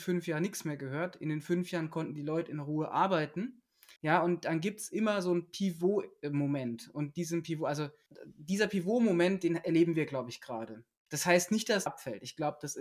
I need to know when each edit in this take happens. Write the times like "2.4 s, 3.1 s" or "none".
4.0 s, 8.1 s, 11.9 s